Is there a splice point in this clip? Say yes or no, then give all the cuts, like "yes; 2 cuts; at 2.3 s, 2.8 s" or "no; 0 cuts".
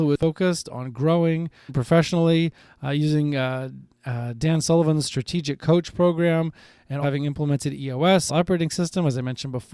yes; 3 cuts; at 1.7 s, 7.0 s, 8.3 s